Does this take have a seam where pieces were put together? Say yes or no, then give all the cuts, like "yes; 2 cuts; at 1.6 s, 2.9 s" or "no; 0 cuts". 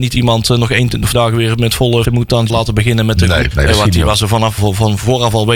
yes; 5 cuts; at 1.1 s, 2.0 s, 2.5 s, 3.5 s, 4.6 s